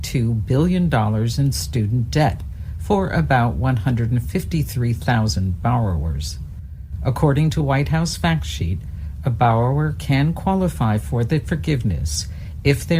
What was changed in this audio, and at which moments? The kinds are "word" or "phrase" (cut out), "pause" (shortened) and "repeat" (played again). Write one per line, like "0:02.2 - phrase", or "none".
0:07.6 - word